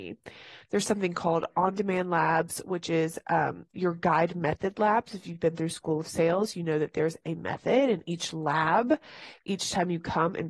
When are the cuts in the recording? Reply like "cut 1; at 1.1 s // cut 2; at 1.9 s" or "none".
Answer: none